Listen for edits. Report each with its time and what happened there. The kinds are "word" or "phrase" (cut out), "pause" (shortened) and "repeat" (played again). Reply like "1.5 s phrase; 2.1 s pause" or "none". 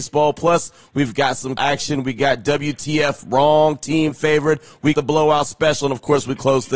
1.6 s phrase; 4.9 s word